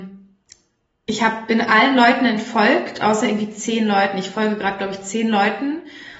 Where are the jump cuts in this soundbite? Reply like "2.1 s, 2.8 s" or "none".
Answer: none